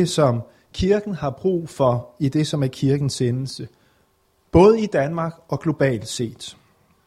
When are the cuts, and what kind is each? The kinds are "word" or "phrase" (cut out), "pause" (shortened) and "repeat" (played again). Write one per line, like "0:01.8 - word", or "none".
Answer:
none